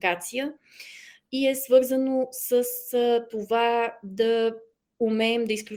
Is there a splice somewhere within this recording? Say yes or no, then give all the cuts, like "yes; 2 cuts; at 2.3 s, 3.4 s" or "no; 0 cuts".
no; 0 cuts